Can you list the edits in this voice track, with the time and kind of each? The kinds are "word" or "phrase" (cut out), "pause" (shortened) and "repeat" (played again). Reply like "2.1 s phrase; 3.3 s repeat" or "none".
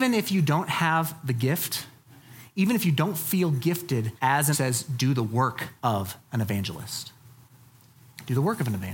4.2 s pause; 4.5 s phrase; 5.8 s pause